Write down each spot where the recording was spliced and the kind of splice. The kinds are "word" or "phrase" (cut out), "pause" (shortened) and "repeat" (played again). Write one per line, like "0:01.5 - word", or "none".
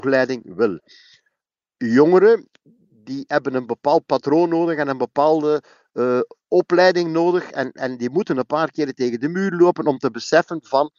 none